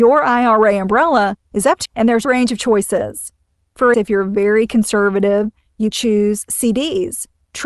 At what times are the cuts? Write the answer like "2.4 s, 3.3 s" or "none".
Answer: 1.9 s, 2.2 s, 3.9 s, 5.9 s